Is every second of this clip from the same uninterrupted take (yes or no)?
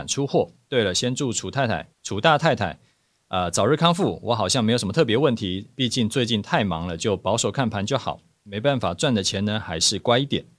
no